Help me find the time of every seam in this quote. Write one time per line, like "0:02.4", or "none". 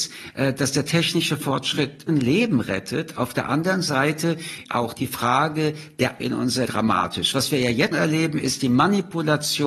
0:02.1
0:04.7
0:06.2
0:06.7
0:07.9